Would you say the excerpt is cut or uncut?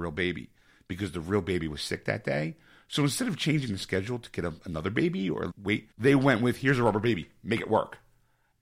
cut